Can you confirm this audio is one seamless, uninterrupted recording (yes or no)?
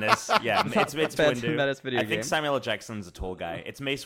no